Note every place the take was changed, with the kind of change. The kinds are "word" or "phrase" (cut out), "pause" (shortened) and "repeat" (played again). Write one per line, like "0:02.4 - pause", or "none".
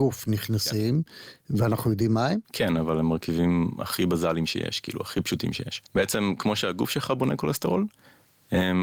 0:02.4 - pause
0:05.9 - pause